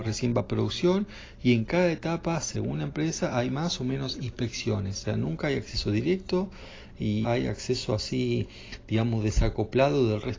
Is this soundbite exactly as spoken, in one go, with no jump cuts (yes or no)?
no